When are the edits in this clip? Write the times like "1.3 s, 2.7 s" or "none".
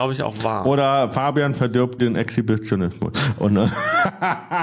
2.0 s